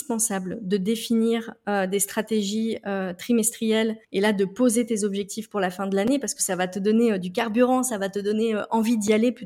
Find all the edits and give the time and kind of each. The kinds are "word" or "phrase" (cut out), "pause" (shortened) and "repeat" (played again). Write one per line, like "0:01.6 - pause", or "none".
0:04.0 - pause